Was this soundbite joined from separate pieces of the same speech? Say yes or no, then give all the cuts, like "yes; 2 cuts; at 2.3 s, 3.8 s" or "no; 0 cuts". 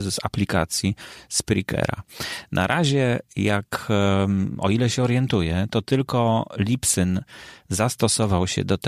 no; 0 cuts